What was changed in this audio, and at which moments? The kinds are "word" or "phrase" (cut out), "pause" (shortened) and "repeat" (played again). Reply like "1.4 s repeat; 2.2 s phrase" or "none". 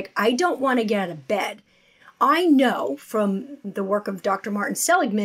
none